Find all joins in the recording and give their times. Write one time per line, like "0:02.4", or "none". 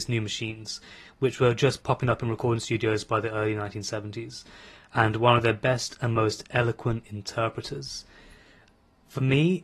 0:01.8